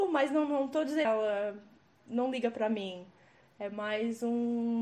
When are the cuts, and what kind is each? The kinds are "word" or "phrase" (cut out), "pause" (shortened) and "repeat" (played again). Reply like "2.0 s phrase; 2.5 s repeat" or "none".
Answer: 1.0 s phrase